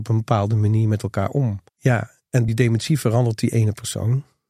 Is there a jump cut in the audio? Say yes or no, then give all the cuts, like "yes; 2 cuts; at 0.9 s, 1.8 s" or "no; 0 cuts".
yes; 2 cuts; at 1.7 s, 2.5 s